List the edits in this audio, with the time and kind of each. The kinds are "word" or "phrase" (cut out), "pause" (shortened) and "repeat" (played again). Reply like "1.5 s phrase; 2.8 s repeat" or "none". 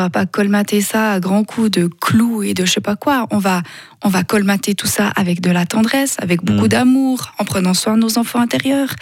none